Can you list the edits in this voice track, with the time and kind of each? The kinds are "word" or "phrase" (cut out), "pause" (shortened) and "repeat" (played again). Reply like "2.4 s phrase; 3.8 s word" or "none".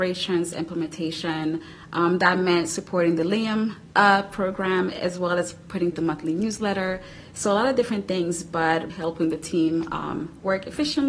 5.9 s word; 8.9 s word